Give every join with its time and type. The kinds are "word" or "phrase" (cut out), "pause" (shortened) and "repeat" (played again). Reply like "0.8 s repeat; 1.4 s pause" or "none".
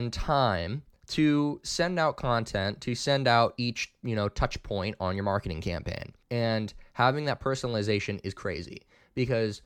6.2 s pause